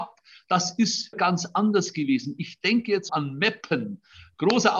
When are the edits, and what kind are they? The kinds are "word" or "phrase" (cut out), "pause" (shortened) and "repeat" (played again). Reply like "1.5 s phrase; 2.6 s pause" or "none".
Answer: 1.1 s word; 3.1 s word